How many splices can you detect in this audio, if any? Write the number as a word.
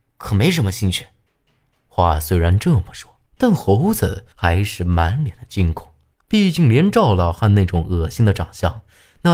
four